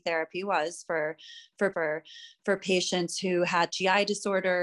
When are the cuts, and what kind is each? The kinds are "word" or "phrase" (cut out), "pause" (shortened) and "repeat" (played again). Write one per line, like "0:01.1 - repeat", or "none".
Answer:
0:01.7 - repeat
0:03.7 - word